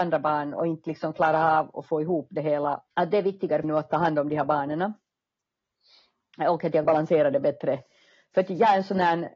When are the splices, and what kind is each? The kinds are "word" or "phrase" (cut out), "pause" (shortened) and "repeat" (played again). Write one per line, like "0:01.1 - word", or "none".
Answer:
0:02.9 - pause
0:03.6 - phrase
0:06.8 - word

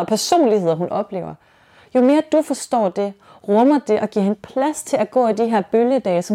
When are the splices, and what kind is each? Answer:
none

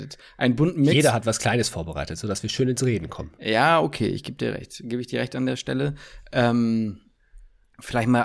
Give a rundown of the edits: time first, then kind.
none

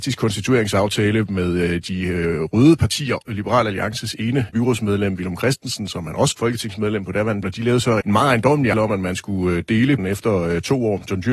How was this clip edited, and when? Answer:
0:03.3 - word
0:04.5 - word
0:06.3 - word
0:07.4 - word
0:08.0 - word
0:08.7 - word
0:10.0 - word

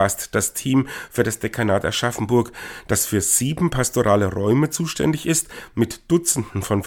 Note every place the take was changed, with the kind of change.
none

